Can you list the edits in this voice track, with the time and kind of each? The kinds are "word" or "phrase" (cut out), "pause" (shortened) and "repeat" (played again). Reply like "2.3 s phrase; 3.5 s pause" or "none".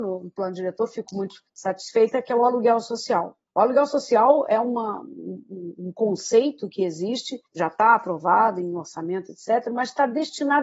1.5 s pause; 3.5 s pause; 7.5 s pause